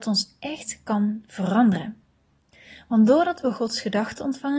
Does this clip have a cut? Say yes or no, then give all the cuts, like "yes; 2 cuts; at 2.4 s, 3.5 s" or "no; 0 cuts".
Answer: no; 0 cuts